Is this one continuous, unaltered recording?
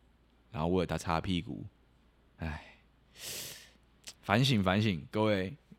no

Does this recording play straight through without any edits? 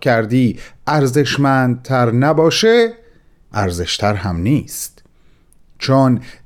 no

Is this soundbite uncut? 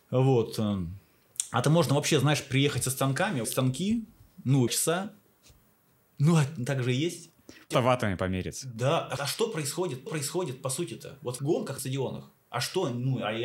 no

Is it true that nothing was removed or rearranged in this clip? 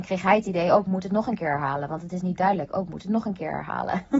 yes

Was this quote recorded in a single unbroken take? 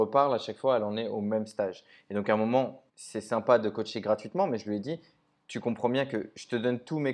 no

